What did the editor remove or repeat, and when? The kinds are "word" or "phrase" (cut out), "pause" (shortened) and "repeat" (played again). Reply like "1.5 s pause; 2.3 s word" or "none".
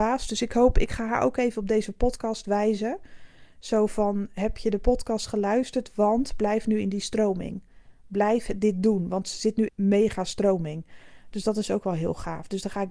9.7 s phrase